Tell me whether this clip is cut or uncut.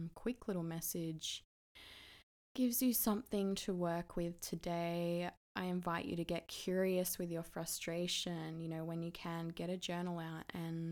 uncut